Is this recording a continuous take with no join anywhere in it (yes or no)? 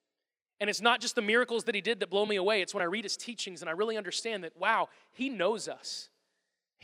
yes